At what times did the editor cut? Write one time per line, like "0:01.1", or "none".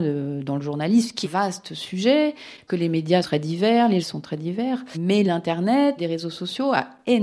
0:01.2
0:02.7
0:03.2
0:04.0
0:05.3
0:06.0